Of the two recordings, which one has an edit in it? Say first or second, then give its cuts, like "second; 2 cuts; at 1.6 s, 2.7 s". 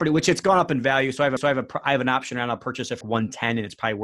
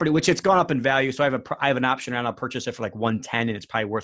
first; 2 cuts; at 1.4 s, 3.0 s